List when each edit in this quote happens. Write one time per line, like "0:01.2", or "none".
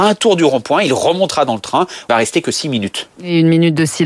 0:02.1